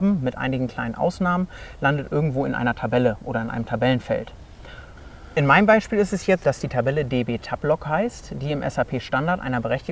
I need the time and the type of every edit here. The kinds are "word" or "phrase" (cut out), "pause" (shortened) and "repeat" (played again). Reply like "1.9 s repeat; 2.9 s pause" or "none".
6.4 s word